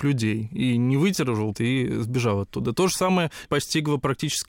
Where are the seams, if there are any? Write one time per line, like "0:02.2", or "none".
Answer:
0:01.5
0:03.5